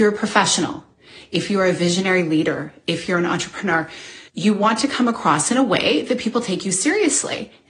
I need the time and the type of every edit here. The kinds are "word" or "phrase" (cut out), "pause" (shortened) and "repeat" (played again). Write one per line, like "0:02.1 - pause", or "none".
0:04.3 - pause

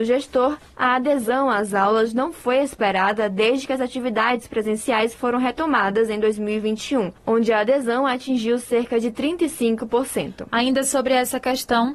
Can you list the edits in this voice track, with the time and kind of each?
0:07.2 - pause

